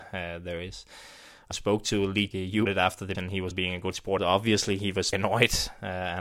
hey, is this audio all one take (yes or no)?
no